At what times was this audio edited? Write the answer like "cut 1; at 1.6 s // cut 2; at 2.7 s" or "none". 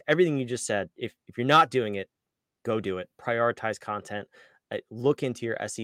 none